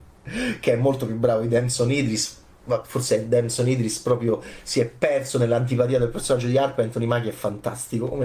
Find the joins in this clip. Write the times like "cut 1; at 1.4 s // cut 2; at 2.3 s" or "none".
none